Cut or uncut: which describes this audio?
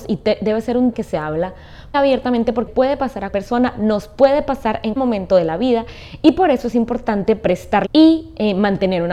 cut